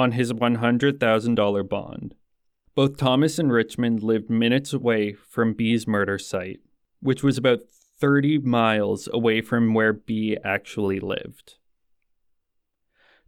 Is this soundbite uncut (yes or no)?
yes